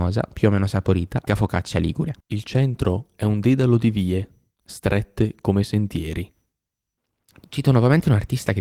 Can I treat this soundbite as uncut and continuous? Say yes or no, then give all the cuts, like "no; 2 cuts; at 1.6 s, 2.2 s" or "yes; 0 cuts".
no; 2 cuts; at 1.3 s, 2.2 s